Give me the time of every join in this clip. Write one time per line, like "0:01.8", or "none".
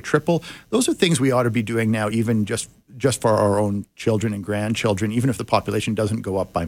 none

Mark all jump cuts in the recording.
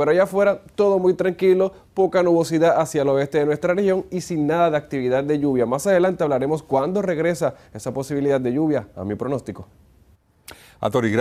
none

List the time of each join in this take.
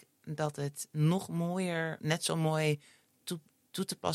0:02.0

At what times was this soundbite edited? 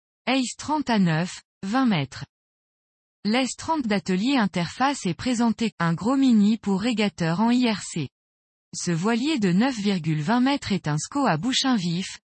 0:05.7

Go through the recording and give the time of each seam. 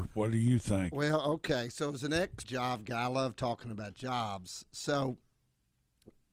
0:02.4

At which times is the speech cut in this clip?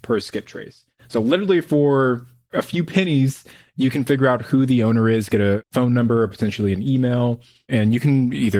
none

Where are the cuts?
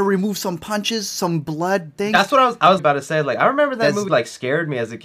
0:02.0
0:02.8
0:04.1

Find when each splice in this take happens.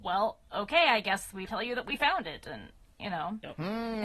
0:01.5

